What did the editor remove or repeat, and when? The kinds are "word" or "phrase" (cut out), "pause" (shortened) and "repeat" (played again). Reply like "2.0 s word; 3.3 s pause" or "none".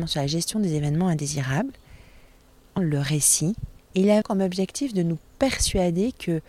2.8 s word; 3.8 s pause; 4.2 s word